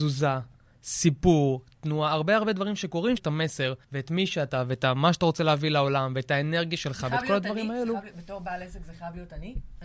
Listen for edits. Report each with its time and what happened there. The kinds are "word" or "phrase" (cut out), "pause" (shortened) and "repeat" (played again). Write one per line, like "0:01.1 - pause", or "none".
0:03.2 - phrase
0:03.8 - pause